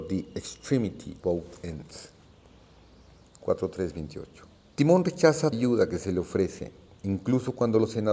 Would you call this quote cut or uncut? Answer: cut